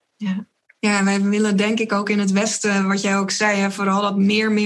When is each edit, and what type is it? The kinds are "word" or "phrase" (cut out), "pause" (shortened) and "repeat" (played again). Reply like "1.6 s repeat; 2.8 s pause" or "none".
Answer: none